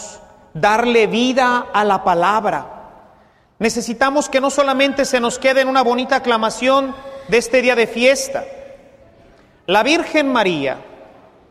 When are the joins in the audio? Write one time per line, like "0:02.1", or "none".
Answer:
none